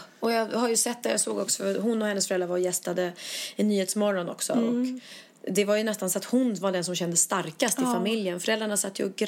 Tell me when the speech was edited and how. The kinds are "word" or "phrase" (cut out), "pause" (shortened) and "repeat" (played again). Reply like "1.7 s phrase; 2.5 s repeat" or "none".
none